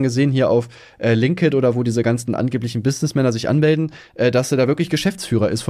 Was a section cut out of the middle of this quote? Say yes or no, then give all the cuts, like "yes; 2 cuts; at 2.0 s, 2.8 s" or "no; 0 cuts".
no; 0 cuts